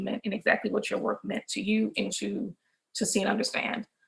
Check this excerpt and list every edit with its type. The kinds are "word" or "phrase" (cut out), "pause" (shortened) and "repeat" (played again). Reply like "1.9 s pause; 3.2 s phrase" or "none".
2.1 s phrase